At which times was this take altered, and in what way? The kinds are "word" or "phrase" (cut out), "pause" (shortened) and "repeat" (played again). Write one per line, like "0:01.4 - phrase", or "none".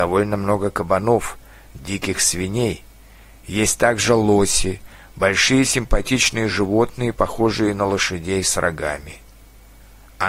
none

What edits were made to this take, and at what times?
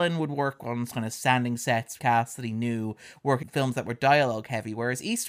0:02.0 - word
0:03.4 - word

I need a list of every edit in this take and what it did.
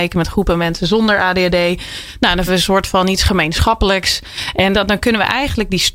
0:02.5 - word
0:04.7 - word

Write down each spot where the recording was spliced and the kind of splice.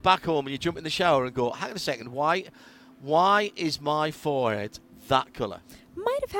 none

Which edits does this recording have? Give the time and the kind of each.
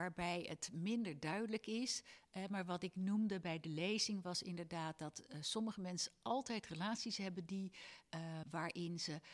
0:08.4 - word

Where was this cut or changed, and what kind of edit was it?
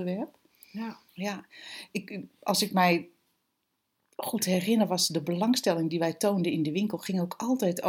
0:01.1 - pause

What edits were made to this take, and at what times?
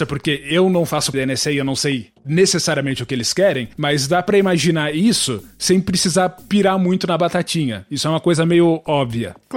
0:01.1 - word

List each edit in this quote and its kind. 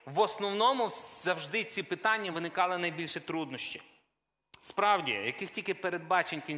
none

